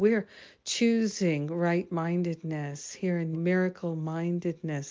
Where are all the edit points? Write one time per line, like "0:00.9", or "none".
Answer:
0:03.3